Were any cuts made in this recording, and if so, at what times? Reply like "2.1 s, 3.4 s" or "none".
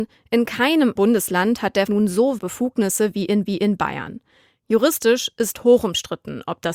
1.0 s, 1.9 s, 2.4 s, 3.5 s